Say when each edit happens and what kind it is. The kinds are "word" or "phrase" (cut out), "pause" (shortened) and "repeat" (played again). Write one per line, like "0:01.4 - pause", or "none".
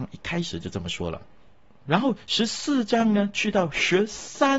none

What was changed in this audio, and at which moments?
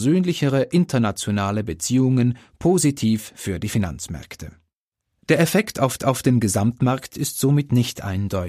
0:04.8 - pause
0:06.0 - repeat

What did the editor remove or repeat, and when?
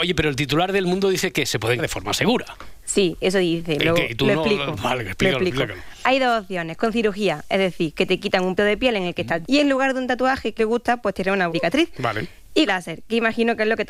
0:01.8 - word
0:08.6 - word
0:09.4 - word
0:10.6 - word
0:11.5 - word
0:12.7 - word

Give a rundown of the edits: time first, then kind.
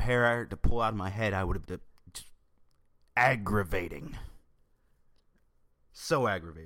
0:01.6 - word

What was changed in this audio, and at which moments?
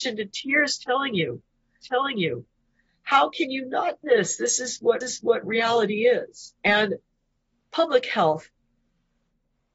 0:01.8 - repeat
0:04.0 - word
0:05.0 - repeat
0:06.6 - pause

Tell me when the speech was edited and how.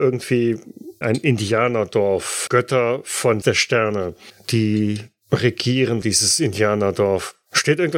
0:01.0 - word
0:02.5 - word
0:03.4 - word
0:06.0 - word

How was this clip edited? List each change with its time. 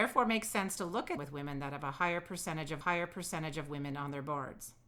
0:01.2 - word
0:02.8 - repeat

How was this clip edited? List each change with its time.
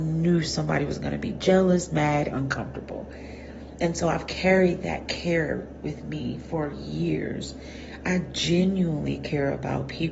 0:02.3 - word

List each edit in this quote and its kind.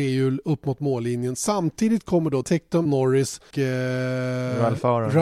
0:02.4 - word
0:02.9 - word
0:03.5 - word

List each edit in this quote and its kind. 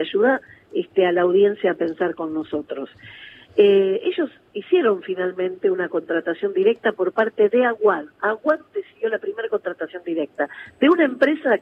none

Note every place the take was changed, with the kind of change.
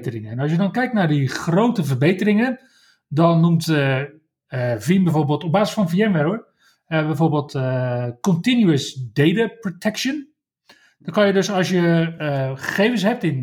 none

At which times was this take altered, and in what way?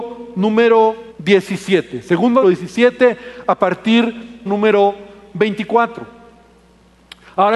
0:01.1 - pause
0:02.4 - phrase
0:04.5 - phrase

